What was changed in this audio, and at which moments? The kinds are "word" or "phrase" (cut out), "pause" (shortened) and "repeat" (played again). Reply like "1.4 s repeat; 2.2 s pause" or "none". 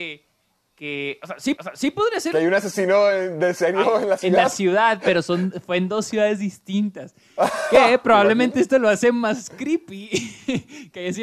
1.6 s repeat; 3.8 s word